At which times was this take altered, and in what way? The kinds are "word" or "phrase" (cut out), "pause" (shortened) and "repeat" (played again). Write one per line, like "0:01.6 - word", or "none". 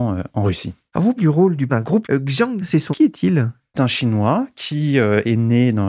0:01.2 - word
0:01.7 - word
0:02.0 - word
0:02.6 - word
0:02.9 - word
0:03.7 - word